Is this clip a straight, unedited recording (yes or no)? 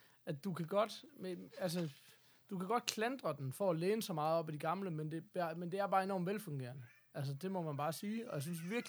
yes